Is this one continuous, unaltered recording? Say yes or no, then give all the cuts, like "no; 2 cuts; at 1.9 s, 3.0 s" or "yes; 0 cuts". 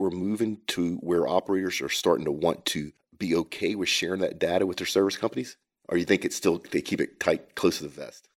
yes; 0 cuts